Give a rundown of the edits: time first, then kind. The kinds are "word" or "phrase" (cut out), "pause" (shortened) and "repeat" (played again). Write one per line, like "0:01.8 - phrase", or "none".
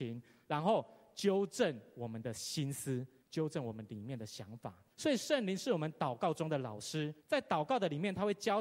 0:03.2 - pause
0:04.9 - pause
0:07.2 - pause